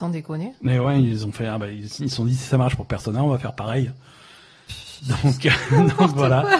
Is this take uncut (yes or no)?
yes